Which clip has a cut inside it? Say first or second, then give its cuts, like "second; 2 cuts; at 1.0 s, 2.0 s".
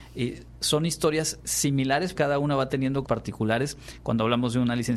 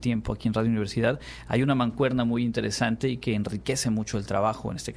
first; 2 cuts; at 2.1 s, 3.0 s